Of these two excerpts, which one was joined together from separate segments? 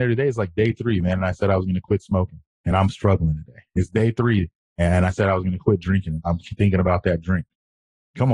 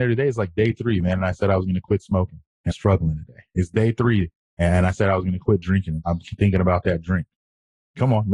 second; 1 cut; at 2.7 s

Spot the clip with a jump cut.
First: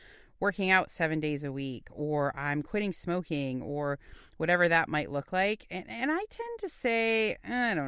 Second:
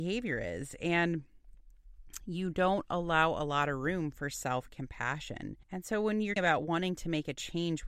second; 2 cuts; at 5.6 s, 6.4 s

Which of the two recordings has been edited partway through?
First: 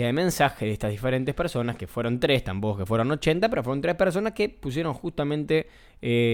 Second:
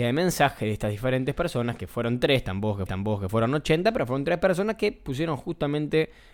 second; 1 cut; at 2.9 s

